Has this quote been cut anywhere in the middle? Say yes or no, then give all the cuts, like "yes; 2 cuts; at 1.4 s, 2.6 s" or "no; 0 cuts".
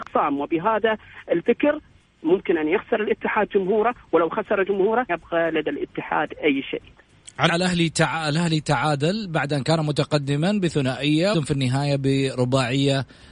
yes; 3 cuts; at 5.1 s, 7.5 s, 11.3 s